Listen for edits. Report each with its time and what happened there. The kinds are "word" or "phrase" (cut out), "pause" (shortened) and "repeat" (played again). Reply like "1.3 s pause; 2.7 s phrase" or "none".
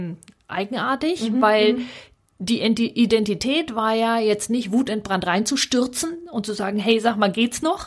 none